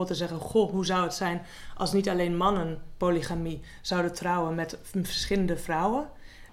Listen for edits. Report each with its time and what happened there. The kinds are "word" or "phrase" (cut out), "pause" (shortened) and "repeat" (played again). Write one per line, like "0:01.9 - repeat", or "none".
none